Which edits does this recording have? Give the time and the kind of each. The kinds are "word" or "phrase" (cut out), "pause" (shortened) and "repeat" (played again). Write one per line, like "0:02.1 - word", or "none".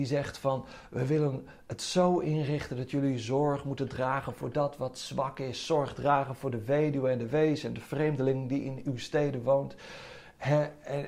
none